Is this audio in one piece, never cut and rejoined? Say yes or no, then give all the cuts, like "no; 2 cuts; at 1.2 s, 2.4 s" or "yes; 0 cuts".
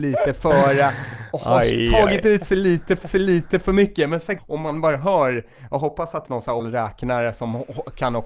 no; 4 cuts; at 3.0 s, 4.4 s, 6.3 s, 6.6 s